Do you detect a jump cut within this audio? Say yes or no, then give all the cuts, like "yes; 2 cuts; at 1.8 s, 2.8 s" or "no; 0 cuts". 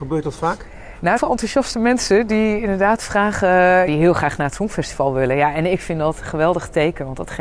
yes; 2 cuts; at 1.2 s, 3.9 s